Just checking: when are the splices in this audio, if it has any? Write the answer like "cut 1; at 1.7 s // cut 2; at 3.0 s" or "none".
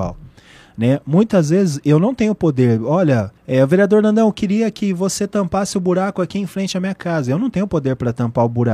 cut 1; at 3.4 s

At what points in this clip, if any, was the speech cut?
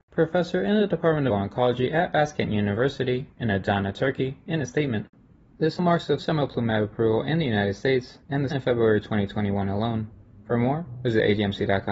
cut 1; at 1.3 s // cut 2; at 5.8 s // cut 3; at 6.2 s // cut 4; at 8.5 s

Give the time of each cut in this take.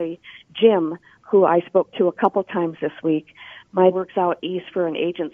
cut 1; at 3.9 s

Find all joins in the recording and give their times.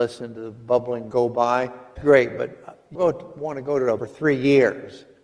cut 1; at 1.1 s // cut 2; at 2.0 s // cut 3; at 2.9 s // cut 4; at 4.0 s

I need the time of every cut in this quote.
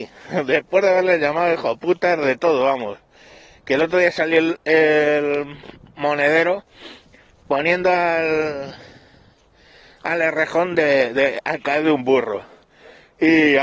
none

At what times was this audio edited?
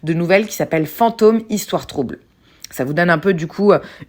none

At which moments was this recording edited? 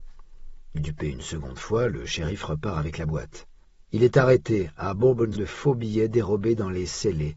cut 1; at 3.6 s // cut 2; at 5.3 s

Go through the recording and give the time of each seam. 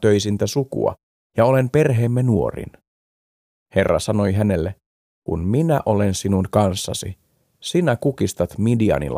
none

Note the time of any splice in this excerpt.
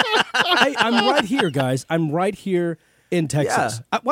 none

